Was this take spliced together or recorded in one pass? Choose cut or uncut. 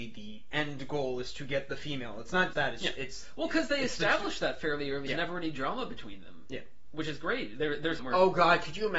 cut